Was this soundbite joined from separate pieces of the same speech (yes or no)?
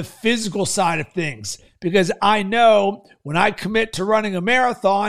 no